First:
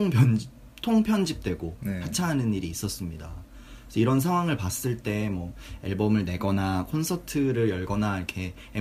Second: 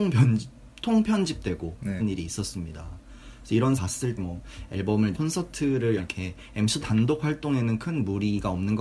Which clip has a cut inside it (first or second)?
second